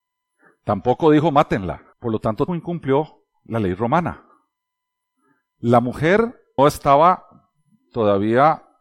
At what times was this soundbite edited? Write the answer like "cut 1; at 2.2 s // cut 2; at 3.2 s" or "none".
cut 1; at 1.9 s // cut 2; at 2.5 s // cut 3; at 6.6 s